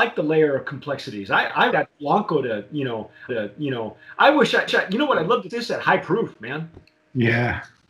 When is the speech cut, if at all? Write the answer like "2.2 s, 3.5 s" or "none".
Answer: 1.7 s, 3.3 s, 4.7 s, 5.5 s, 6.8 s

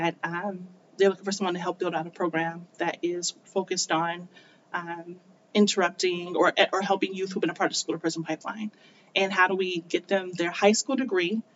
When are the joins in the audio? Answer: none

